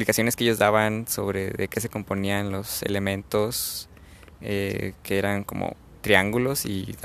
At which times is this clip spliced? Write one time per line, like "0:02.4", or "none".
none